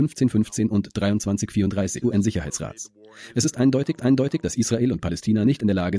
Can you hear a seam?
yes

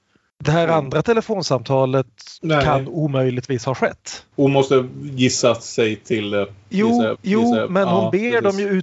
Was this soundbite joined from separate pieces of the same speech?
yes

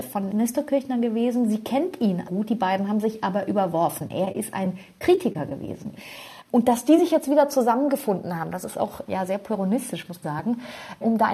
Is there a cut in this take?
yes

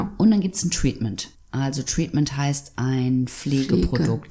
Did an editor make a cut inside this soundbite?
yes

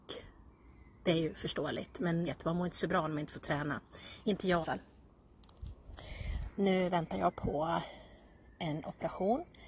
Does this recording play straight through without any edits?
no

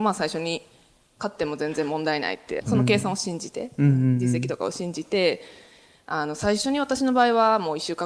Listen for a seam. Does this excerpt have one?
yes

